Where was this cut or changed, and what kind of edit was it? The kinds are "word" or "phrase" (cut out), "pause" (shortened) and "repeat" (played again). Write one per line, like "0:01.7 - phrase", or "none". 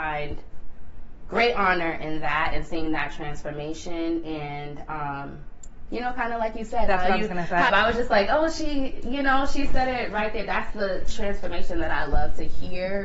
0:07.7 - phrase